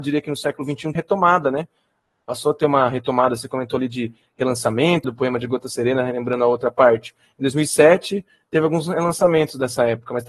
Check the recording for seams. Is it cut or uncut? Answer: cut